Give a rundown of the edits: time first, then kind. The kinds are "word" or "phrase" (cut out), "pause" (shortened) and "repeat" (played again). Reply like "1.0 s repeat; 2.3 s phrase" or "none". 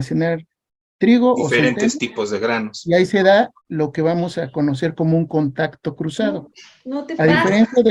3.6 s pause